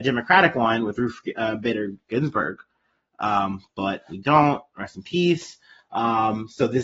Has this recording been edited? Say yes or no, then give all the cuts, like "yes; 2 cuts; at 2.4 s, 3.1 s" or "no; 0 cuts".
no; 0 cuts